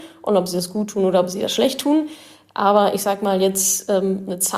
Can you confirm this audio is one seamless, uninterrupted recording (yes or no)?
yes